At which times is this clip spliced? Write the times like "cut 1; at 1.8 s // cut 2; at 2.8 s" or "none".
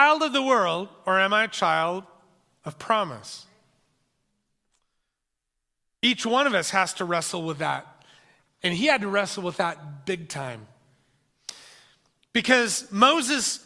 none